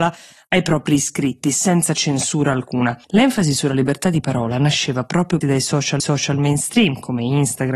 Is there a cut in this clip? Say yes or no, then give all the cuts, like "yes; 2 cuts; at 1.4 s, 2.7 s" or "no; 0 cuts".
yes; 3 cuts; at 3.0 s, 5.4 s, 6.0 s